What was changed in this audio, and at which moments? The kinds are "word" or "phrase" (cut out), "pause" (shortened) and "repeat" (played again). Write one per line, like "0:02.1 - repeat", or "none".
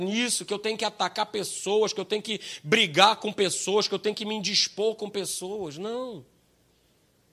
none